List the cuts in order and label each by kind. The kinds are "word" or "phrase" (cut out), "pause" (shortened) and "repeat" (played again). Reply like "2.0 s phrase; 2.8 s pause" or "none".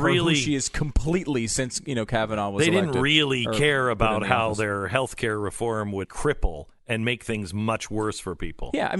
6.0 s word